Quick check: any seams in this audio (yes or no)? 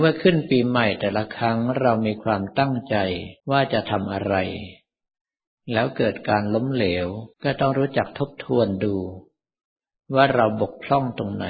yes